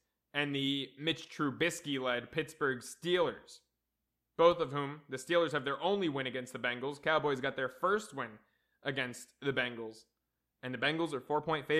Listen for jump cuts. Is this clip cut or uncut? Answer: uncut